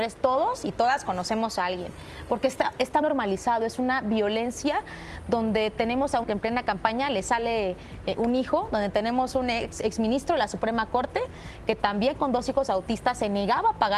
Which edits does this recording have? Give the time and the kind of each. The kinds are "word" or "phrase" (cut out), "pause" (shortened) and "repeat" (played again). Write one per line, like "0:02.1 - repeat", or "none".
0:03.0 - word
0:06.2 - phrase